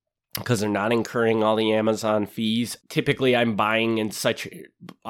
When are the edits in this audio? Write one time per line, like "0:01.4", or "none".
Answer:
0:02.8